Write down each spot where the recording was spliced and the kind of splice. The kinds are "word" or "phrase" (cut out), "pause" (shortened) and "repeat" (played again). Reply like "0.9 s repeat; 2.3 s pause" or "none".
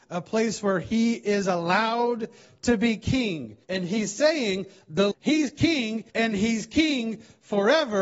3.6 s pause; 5.1 s word; 6.1 s pause